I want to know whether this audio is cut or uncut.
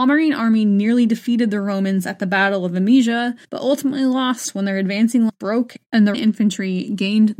cut